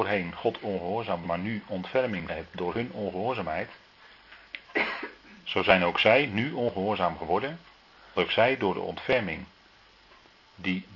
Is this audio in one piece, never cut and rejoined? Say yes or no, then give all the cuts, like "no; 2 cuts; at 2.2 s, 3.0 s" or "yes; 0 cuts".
no; 3 cuts; at 1.2 s, 2.3 s, 8.2 s